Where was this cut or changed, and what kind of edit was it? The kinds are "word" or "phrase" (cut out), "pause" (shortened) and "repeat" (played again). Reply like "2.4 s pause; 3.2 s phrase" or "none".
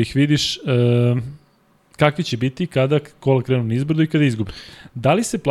none